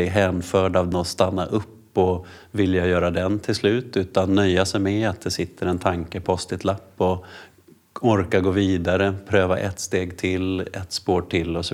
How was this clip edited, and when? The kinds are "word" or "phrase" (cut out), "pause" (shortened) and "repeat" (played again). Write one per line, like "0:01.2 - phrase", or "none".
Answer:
0:00.9 - word
0:06.2 - word